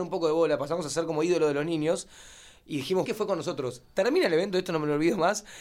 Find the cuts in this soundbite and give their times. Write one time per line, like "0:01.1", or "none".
0:03.0